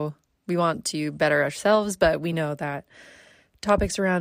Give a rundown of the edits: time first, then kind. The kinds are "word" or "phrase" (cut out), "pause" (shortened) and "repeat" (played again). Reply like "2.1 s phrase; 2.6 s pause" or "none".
none